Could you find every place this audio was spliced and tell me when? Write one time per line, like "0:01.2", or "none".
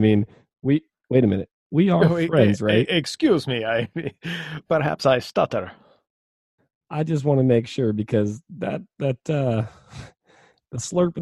none